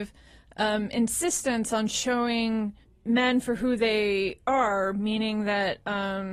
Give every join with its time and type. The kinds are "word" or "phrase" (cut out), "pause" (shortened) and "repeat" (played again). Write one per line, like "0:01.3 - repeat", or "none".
0:02.8 - pause